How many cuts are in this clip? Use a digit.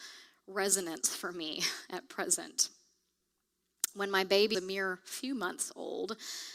1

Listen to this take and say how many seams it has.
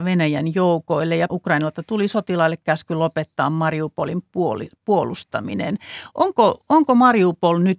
1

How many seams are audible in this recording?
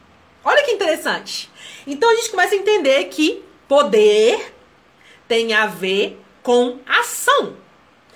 0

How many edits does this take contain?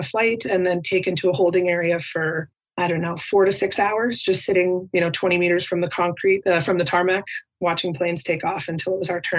0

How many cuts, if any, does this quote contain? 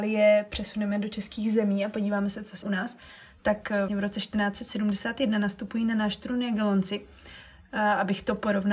2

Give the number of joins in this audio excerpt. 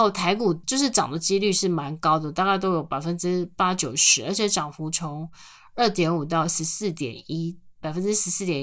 0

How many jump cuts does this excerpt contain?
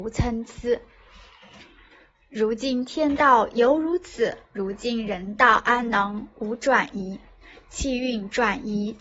1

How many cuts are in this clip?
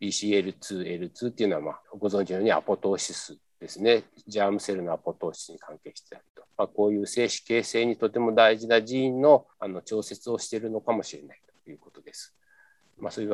3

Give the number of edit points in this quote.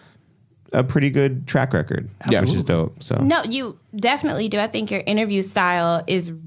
1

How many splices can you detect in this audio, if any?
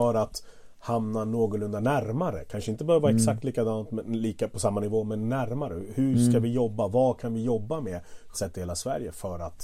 1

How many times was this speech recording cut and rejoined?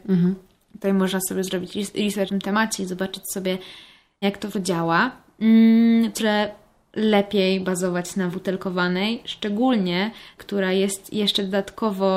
6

